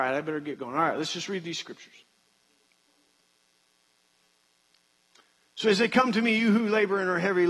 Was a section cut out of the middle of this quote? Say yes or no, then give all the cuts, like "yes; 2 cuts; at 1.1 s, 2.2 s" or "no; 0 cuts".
no; 0 cuts